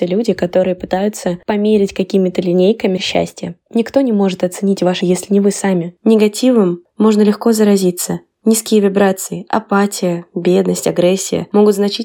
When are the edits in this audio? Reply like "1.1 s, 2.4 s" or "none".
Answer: 3.0 s, 5.0 s